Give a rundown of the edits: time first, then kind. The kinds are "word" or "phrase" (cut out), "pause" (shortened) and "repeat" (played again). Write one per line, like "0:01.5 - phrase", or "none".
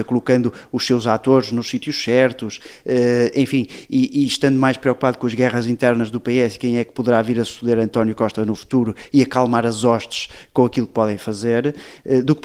none

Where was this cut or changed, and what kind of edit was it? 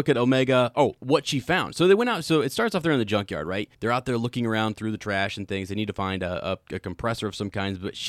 0:03.7 - pause

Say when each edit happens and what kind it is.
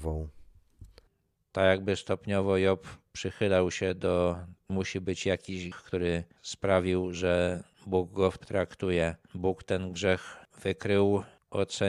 0:01.1 - pause
0:04.7 - phrase
0:05.7 - word
0:08.4 - phrase

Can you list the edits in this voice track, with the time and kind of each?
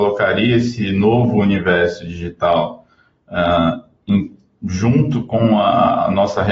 none

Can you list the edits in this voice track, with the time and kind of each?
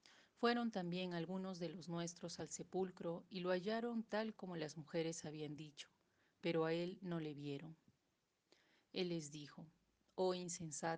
none

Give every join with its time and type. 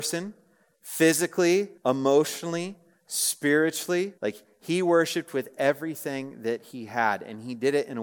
0:01.8 - pause
0:04.2 - pause

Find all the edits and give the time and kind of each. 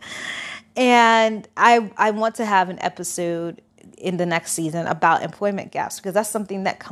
none

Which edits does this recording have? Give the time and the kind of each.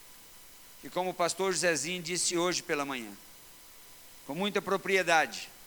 none

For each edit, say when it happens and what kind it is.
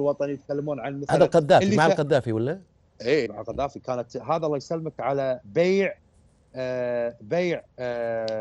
0:03.3 - word

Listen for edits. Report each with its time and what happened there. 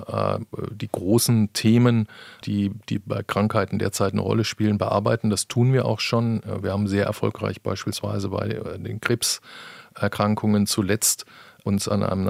none

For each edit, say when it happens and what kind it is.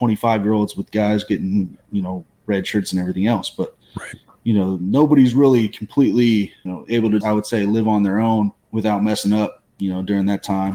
0:06.7 - word
0:07.2 - word

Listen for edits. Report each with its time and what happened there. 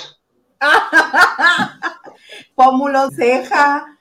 0:02.5 - word
0:03.1 - word

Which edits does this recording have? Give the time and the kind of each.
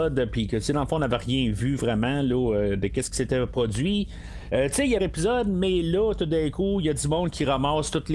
0:05.0 - phrase

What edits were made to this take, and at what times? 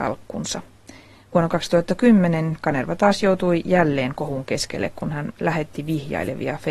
none

